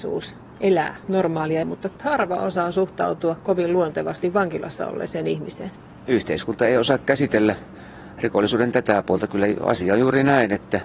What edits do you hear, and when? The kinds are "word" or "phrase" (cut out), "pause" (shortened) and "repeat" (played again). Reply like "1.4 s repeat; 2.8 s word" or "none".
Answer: 1.6 s word